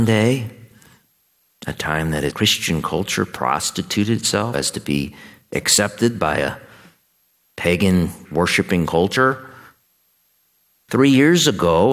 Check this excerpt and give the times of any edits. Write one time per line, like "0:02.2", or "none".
0:02.3
0:04.5
0:08.2